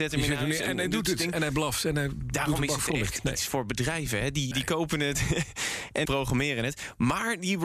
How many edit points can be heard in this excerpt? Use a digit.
2